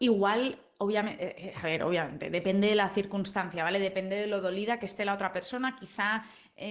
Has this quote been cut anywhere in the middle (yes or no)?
no